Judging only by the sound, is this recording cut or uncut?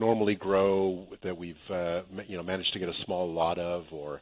uncut